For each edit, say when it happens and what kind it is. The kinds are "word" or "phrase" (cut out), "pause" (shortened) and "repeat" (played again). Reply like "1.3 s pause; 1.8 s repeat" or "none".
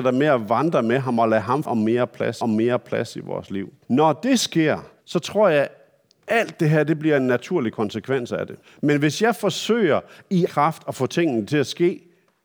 1.6 s phrase; 2.4 s repeat; 3.8 s pause; 5.0 s pause; 8.6 s pause; 10.5 s word